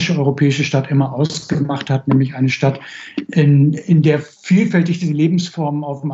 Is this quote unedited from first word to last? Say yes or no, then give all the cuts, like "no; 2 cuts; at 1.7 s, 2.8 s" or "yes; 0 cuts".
no; 1 cut; at 4.3 s